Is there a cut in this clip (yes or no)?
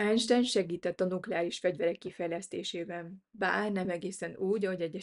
no